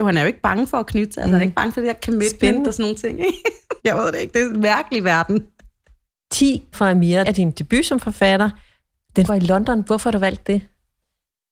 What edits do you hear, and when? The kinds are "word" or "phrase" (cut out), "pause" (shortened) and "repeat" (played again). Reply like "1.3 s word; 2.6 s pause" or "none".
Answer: 3.8 s pause; 6.7 s word; 7.2 s word; 9.3 s word